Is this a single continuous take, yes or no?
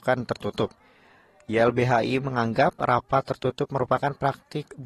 yes